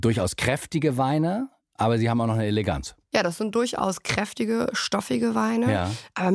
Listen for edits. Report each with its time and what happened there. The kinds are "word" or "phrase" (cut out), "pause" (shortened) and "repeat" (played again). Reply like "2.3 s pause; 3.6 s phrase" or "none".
none